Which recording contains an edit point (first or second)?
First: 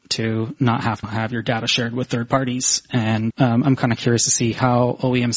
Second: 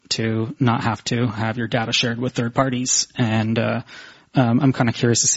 first